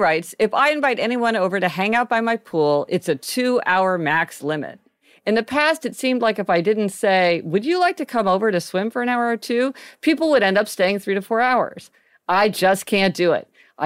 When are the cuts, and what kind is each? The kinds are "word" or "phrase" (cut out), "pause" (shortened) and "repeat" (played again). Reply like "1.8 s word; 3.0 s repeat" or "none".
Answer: none